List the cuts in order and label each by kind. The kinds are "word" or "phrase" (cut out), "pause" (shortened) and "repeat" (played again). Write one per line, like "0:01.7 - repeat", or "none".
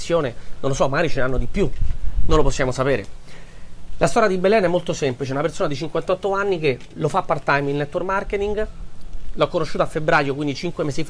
none